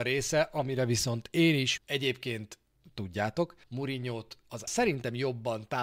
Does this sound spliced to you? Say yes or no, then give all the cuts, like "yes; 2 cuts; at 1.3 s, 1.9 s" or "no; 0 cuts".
yes; 3 cuts; at 1.8 s, 3.6 s, 4.7 s